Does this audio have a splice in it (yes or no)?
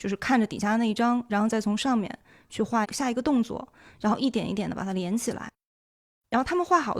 no